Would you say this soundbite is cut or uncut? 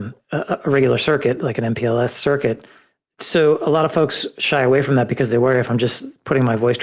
uncut